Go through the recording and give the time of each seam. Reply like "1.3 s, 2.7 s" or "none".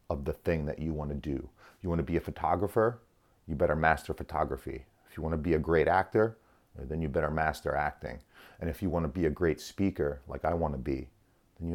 none